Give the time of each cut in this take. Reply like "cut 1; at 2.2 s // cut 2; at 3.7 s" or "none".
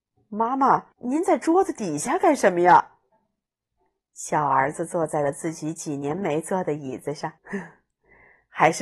cut 1; at 0.9 s // cut 2; at 3.7 s // cut 3; at 7.4 s